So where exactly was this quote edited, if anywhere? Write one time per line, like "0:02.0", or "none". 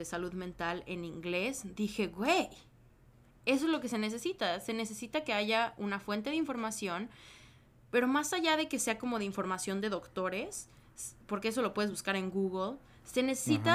none